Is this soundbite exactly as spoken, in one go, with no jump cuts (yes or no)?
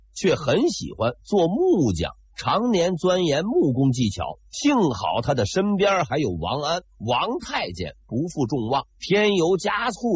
no